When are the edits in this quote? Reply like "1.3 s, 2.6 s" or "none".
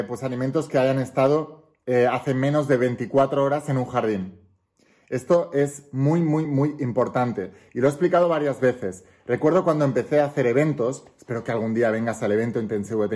none